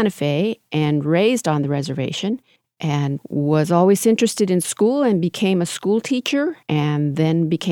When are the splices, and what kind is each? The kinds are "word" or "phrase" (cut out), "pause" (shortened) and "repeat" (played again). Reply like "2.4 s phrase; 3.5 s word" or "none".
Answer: 2.6 s pause; 6.6 s pause